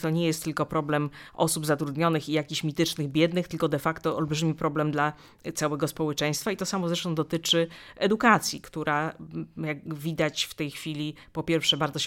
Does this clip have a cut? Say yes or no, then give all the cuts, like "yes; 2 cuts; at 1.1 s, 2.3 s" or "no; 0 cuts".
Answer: no; 0 cuts